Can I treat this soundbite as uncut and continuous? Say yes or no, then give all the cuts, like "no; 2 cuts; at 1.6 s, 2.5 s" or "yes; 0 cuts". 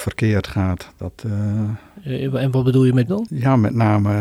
no; 1 cut; at 3.1 s